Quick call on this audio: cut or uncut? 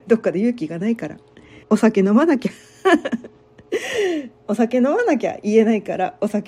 cut